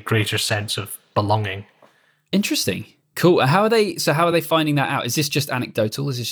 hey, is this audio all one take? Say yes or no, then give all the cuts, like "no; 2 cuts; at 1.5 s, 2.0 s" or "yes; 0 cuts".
yes; 0 cuts